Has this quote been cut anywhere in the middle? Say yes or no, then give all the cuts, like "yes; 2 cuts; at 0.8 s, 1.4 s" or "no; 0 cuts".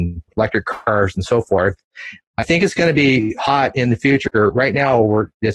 no; 0 cuts